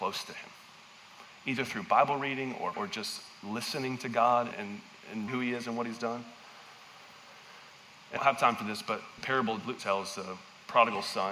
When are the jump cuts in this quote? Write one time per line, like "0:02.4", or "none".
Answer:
0:02.7
0:04.5
0:05.3
0:08.2
0:09.2
0:09.8